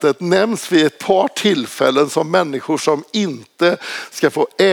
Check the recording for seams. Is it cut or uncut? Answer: uncut